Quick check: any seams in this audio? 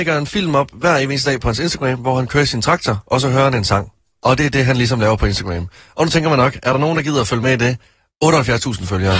no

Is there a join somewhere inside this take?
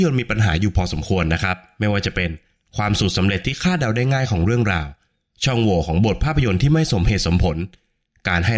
no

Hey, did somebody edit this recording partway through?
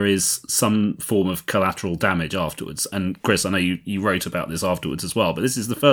no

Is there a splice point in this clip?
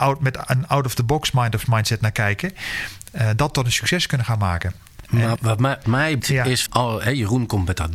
yes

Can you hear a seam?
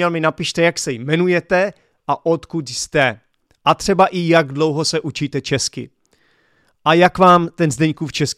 no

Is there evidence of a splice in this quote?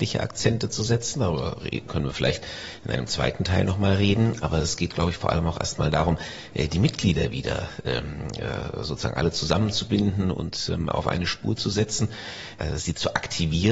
no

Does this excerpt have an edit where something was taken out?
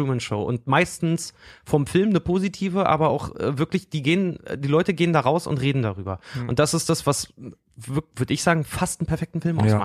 no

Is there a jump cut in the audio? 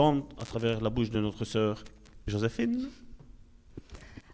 no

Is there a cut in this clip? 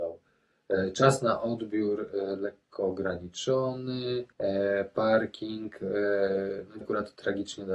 yes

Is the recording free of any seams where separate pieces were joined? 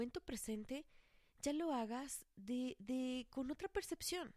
yes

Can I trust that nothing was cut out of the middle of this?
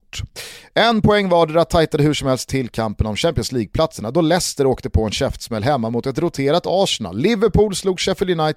yes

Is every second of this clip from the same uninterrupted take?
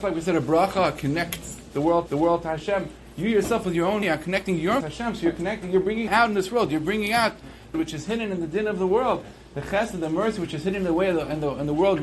no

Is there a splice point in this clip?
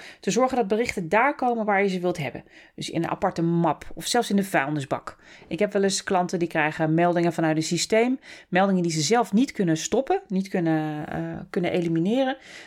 no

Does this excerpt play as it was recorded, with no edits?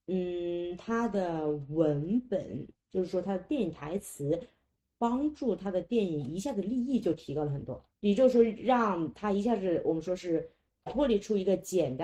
no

